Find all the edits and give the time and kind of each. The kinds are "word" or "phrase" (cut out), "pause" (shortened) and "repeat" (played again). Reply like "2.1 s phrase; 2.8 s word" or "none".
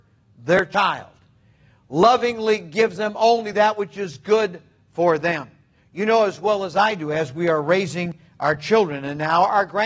none